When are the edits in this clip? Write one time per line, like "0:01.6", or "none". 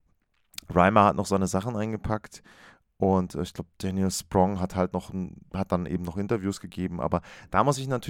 none

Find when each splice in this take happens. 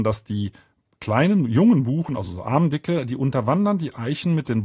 none

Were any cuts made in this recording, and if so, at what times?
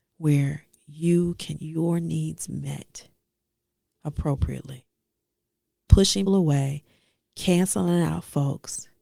0:01.6
0:05.9
0:06.3

